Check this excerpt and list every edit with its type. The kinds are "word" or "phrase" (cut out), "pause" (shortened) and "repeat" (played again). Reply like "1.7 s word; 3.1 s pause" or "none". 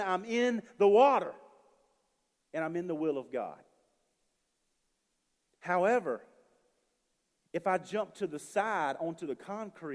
none